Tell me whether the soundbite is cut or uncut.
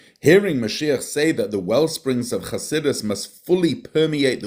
uncut